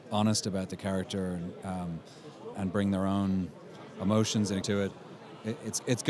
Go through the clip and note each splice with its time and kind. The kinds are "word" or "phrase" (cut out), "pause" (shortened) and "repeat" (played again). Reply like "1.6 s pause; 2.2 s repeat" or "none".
2.5 s word; 4.6 s word